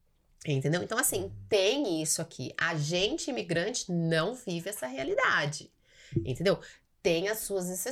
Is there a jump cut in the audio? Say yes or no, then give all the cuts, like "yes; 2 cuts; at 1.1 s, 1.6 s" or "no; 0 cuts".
no; 0 cuts